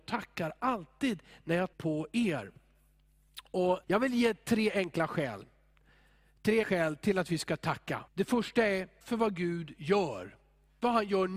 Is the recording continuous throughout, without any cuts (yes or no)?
no